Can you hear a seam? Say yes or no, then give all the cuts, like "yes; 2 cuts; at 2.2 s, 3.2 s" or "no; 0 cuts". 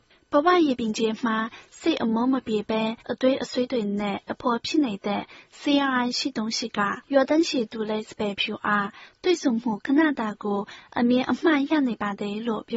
yes; 2 cuts; at 3.0 s, 7.0 s